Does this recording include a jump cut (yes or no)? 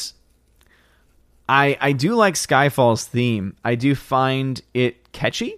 no